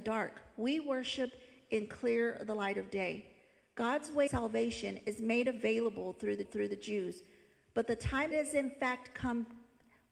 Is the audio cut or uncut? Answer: cut